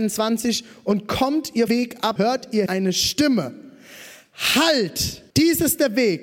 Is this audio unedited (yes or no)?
no